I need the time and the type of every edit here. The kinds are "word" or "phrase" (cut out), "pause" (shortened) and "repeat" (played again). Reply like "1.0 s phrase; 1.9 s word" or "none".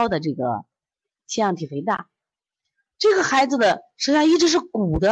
none